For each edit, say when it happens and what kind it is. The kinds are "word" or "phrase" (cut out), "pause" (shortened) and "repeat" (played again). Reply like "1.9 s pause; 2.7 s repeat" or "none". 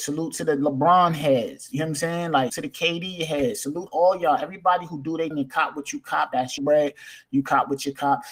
2.5 s word; 3.9 s word; 5.3 s word; 6.6 s word